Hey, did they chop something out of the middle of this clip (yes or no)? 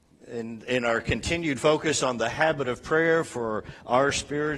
no